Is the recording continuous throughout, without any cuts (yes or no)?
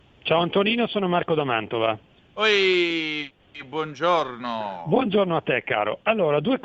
yes